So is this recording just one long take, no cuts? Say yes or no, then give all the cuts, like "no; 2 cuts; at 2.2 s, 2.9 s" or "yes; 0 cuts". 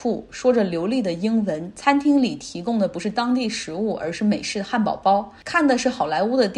no; 1 cut; at 5.4 s